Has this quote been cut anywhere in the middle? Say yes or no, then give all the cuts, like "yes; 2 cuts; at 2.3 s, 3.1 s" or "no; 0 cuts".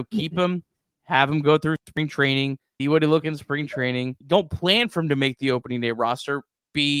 yes; 3 cuts; at 2.8 s, 3.2 s, 4.2 s